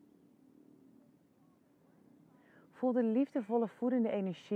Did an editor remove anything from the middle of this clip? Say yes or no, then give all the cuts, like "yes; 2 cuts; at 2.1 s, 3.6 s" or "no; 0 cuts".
no; 0 cuts